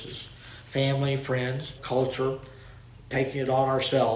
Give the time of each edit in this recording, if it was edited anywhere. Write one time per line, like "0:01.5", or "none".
0:01.8
0:03.1